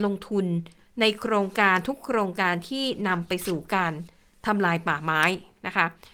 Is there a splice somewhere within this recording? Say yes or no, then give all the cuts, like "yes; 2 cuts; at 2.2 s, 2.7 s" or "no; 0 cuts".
no; 0 cuts